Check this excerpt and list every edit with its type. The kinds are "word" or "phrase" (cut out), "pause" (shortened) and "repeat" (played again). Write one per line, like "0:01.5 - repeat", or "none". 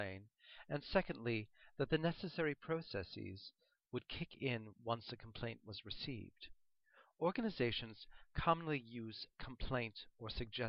none

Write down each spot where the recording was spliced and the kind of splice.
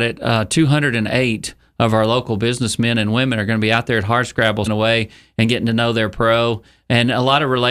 0:04.7 - word

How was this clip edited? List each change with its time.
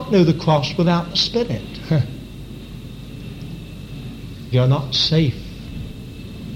0:04.5 - word

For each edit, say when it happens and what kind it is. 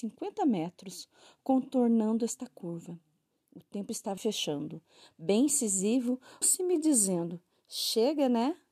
0:04.2 - word
0:06.4 - word

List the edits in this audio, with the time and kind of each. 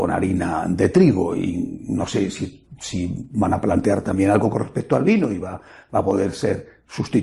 none

